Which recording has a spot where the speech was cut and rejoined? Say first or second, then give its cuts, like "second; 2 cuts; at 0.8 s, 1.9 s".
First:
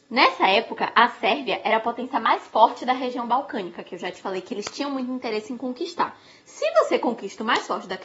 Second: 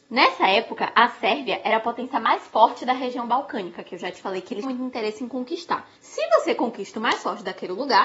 second; 2 cuts; at 4.6 s, 5.9 s